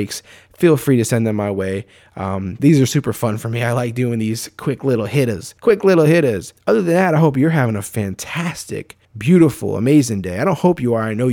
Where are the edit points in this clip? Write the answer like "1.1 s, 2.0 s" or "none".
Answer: 2.6 s, 5.6 s, 6.6 s, 9.0 s